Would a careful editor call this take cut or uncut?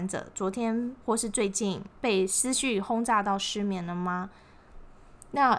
cut